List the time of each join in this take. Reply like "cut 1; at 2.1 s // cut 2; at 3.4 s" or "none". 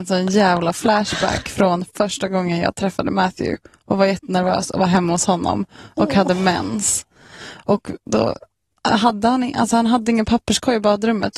none